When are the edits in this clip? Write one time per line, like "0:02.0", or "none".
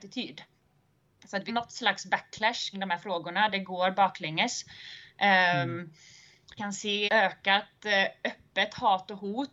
0:01.5
0:02.7
0:06.6
0:07.1